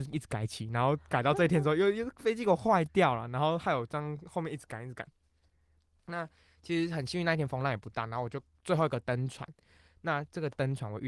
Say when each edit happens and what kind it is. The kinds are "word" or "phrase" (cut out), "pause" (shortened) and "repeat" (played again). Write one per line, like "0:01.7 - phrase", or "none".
none